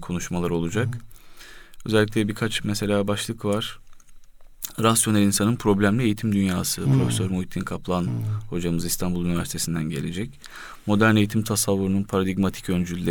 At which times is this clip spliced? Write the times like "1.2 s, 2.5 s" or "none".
none